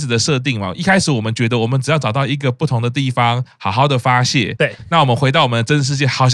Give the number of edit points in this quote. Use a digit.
0